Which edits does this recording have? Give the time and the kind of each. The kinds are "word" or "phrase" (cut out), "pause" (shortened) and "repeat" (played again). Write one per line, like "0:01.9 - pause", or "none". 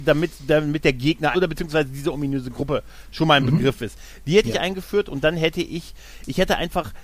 0:01.3 - word